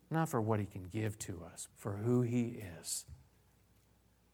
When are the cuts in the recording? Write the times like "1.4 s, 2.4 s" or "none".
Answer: 1.7 s